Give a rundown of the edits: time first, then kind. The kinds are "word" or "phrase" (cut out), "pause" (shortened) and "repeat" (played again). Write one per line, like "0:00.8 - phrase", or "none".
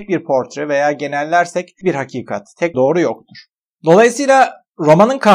0:01.8 - word
0:02.7 - word